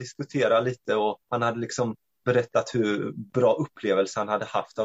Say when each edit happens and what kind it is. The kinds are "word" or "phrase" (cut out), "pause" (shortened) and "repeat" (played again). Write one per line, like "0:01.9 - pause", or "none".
0:01.2 - pause